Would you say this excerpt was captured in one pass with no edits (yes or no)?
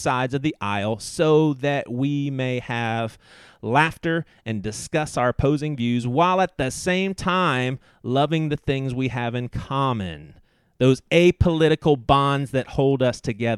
yes